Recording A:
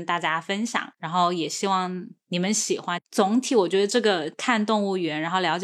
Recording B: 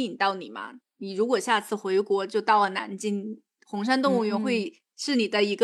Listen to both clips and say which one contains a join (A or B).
A